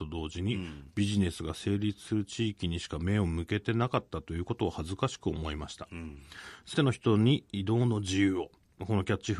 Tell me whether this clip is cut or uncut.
cut